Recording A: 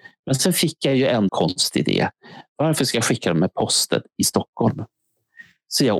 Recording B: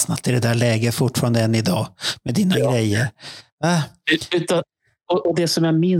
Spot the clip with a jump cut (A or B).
A